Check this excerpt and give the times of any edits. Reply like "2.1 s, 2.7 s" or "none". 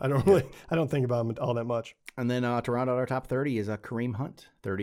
none